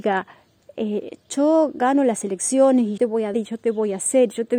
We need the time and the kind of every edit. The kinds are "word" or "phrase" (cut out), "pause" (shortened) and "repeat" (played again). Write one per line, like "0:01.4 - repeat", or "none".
0:03.0 - word
0:03.3 - word